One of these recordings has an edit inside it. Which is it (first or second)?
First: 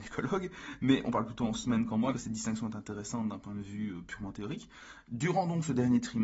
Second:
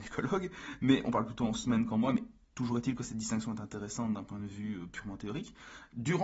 first